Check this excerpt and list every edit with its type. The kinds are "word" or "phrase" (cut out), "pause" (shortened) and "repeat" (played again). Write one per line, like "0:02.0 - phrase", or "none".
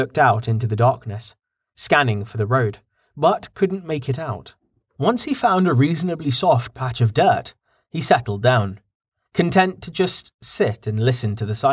none

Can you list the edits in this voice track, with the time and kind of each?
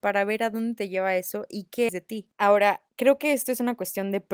0:01.9 - word

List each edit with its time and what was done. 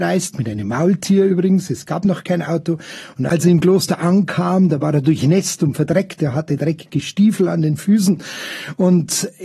none

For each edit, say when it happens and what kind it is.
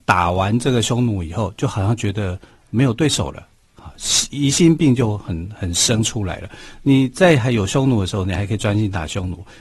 none

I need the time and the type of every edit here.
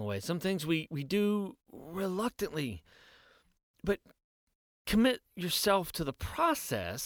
none

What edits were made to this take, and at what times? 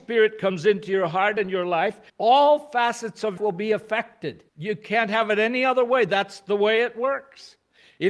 0:02.1 - pause
0:03.4 - phrase
0:04.5 - pause

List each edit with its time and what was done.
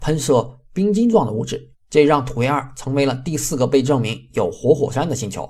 0:01.7 - pause

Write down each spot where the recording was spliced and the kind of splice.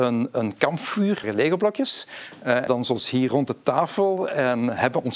0:01.2 - word
0:02.7 - word

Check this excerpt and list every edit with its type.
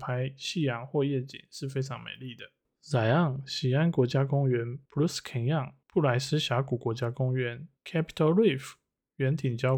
0:04.9 - pause
0:05.8 - pause
0:07.8 - pause

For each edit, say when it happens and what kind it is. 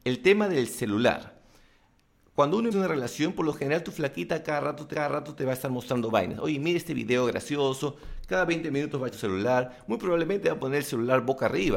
0:02.7 - word
0:04.9 - repeat
0:09.1 - word

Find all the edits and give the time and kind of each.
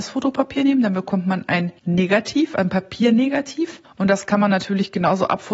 0:01.8 - pause
0:03.8 - pause

